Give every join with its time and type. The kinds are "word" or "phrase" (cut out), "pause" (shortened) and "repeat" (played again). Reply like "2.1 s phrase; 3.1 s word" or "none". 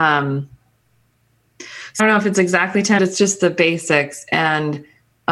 2.0 s phrase; 3.0 s phrase